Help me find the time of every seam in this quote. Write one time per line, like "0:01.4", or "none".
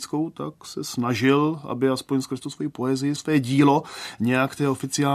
0:03.2